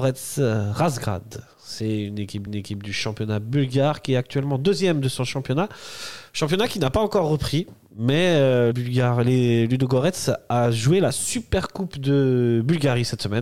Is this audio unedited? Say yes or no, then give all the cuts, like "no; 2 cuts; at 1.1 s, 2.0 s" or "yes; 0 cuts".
no; 2 cuts; at 2.5 s, 8.7 s